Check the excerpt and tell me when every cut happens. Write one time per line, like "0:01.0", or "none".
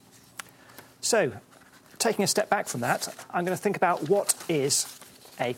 none